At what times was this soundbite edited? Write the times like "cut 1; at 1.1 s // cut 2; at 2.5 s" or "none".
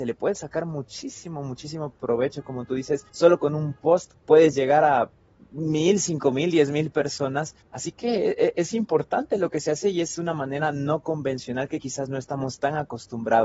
cut 1; at 3.1 s // cut 2; at 4.2 s // cut 3; at 7.6 s

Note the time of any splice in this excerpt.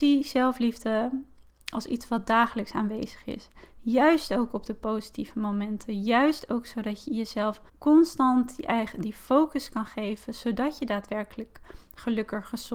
cut 1; at 7.7 s

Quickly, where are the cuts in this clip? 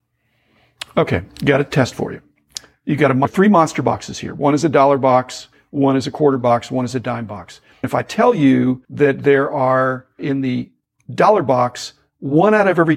cut 1; at 8.8 s

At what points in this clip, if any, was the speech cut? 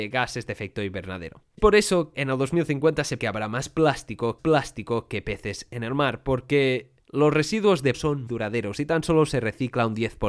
cut 1; at 1.6 s // cut 2; at 2.1 s // cut 3; at 3.2 s // cut 4; at 4.4 s // cut 5; at 7.0 s // cut 6; at 7.9 s // cut 7; at 8.3 s

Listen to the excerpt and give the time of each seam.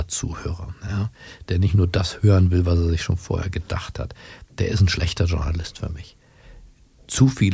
none

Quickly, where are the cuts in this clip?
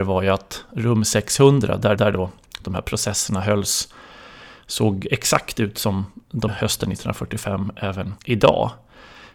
cut 1; at 2.0 s // cut 2; at 6.5 s // cut 3; at 8.2 s

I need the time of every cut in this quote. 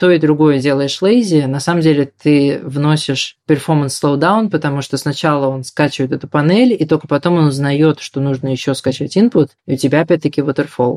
cut 1; at 9.6 s

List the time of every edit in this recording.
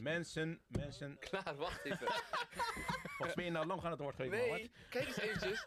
cut 1; at 3.3 s // cut 2; at 3.8 s

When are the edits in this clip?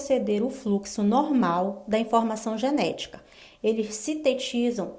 none

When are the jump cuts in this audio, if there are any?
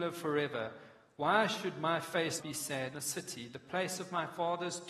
cut 1; at 2.4 s // cut 2; at 2.9 s

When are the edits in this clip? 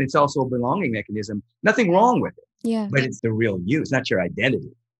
cut 1; at 2.5 s // cut 2; at 3.2 s

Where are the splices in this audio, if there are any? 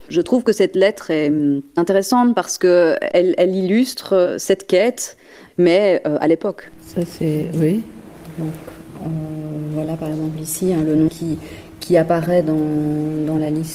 cut 1; at 11.1 s

